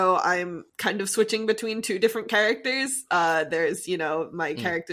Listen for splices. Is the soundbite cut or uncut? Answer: uncut